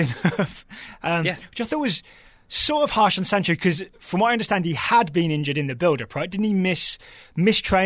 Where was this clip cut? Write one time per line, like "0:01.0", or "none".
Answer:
none